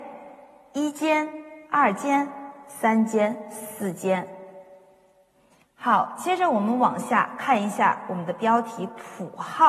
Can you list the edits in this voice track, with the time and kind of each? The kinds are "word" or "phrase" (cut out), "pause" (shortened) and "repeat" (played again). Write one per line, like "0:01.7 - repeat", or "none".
0:01.6 - pause